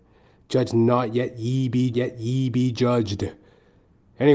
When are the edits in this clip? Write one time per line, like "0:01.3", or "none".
0:01.9